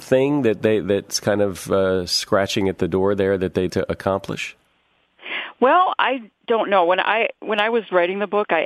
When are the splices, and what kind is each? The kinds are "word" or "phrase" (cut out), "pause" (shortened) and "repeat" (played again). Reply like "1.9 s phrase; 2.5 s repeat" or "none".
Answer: 3.7 s word